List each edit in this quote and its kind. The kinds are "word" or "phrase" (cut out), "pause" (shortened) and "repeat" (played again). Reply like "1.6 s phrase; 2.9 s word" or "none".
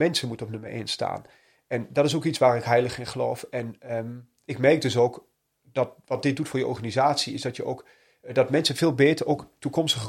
none